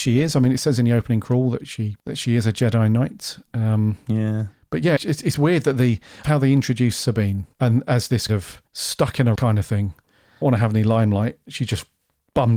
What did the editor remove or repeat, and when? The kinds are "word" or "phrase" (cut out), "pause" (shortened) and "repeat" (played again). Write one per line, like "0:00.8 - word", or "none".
0:02.0 - pause
0:05.0 - word
0:06.2 - phrase
0:07.5 - pause
0:08.3 - word
0:08.7 - pause
0:09.4 - word
0:10.4 - word